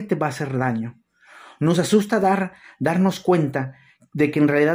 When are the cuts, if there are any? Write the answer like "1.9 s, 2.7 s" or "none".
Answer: none